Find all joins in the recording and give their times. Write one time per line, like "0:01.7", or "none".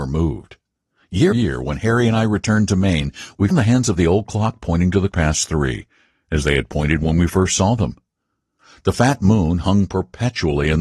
0:01.3
0:03.5
0:05.1